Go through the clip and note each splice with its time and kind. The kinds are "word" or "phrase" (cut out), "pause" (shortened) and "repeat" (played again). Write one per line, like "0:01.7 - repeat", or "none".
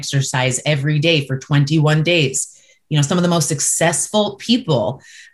none